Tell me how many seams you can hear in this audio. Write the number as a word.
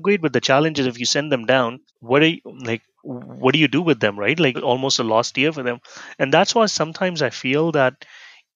two